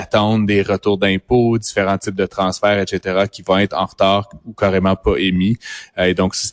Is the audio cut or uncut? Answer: uncut